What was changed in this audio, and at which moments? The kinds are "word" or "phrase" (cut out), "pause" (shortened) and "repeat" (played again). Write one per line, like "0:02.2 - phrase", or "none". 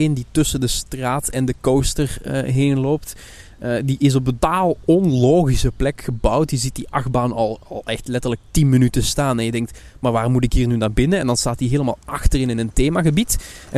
0:04.4 - word